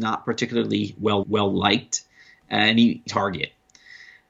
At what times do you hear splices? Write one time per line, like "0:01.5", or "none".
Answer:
0:01.2
0:03.1

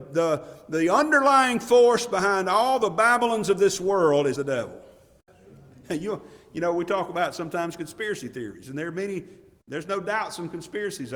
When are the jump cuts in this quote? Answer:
0:04.3

